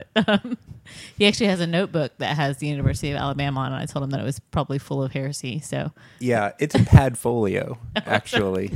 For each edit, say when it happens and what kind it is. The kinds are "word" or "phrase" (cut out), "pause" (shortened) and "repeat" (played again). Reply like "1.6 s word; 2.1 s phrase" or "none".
none